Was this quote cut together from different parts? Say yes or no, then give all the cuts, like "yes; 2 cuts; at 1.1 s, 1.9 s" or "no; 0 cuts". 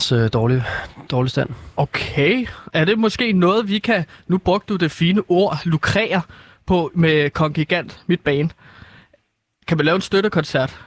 no; 0 cuts